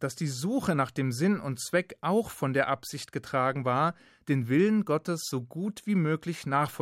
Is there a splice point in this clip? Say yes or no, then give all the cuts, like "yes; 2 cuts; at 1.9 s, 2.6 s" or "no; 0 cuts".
no; 0 cuts